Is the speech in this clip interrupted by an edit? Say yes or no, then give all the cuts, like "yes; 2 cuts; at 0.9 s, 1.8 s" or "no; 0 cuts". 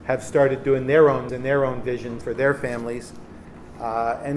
yes; 2 cuts; at 1.3 s, 2.2 s